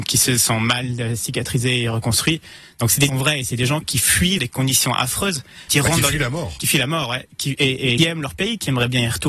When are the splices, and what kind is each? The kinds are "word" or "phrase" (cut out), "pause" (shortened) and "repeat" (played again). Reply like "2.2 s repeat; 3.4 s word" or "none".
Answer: 3.1 s phrase; 3.8 s word; 4.4 s word; 5.7 s word; 8.0 s phrase